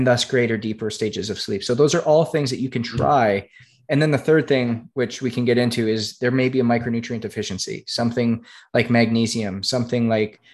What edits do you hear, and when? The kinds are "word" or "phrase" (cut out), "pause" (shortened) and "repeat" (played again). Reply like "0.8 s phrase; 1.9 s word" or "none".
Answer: none